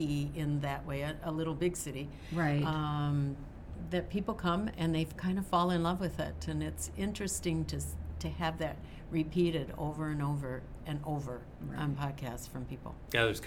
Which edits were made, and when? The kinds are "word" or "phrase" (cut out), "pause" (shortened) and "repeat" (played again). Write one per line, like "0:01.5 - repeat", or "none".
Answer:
none